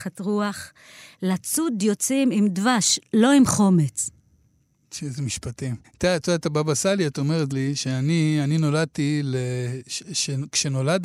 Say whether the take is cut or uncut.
cut